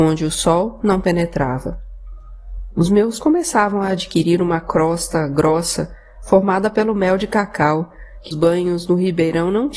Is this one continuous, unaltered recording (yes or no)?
no